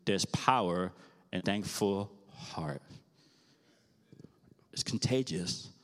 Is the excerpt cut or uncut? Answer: cut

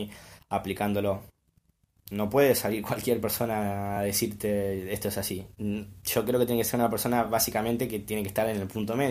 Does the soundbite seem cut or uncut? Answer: uncut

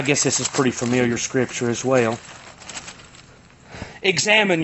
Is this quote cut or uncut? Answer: uncut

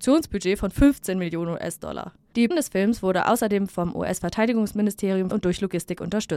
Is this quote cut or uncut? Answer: cut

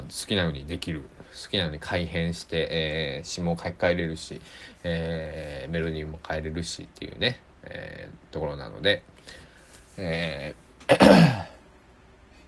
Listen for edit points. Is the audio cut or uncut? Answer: cut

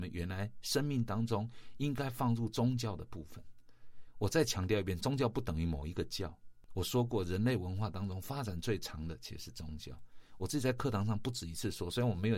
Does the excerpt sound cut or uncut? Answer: uncut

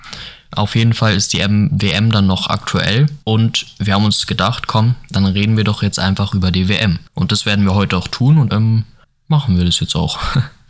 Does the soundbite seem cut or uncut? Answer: cut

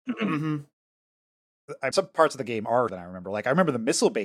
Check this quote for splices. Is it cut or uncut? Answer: cut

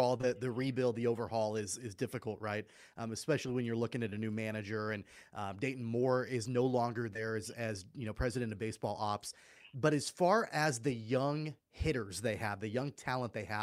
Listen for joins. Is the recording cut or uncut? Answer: cut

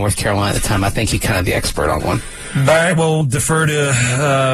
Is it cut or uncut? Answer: cut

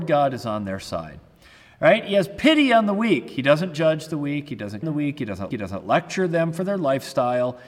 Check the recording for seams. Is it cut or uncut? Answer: cut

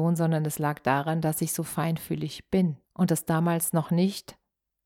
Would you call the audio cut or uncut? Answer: cut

